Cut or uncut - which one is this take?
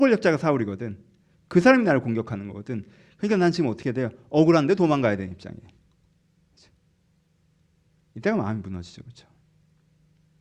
uncut